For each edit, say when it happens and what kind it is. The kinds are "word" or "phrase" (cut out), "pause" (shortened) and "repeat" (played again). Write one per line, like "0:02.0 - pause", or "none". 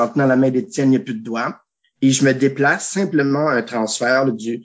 none